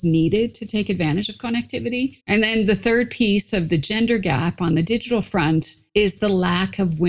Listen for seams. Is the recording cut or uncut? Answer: cut